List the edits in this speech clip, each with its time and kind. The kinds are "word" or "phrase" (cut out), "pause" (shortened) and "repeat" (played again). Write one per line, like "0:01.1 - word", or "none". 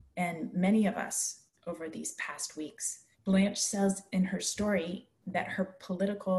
0:03.1 - pause